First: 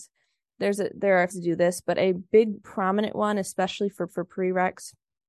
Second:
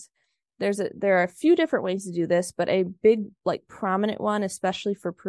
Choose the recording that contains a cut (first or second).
first